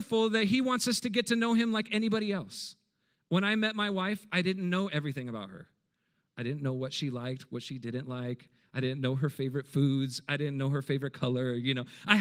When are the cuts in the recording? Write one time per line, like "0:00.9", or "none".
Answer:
none